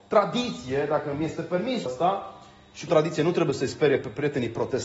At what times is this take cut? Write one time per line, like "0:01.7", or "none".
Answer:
0:01.9
0:02.9